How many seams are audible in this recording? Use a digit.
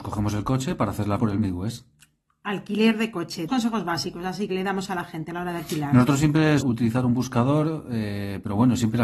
4